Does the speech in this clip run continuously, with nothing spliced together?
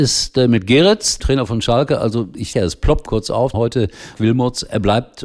no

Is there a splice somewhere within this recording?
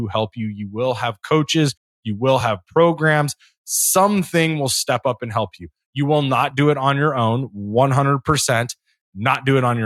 no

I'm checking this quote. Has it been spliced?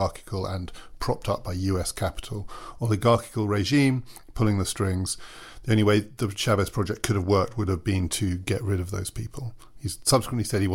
no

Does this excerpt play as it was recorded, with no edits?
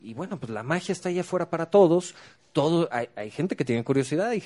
yes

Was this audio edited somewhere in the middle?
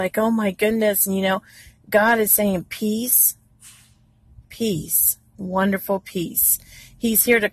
no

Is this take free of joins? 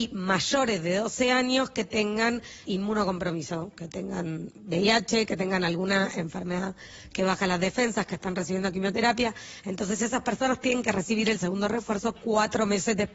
no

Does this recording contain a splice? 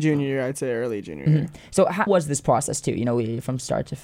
yes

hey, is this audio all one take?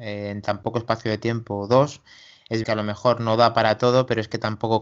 no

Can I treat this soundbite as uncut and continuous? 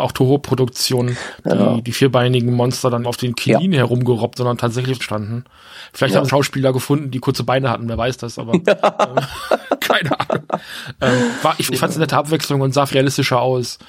no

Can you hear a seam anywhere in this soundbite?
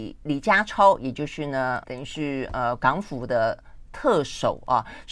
yes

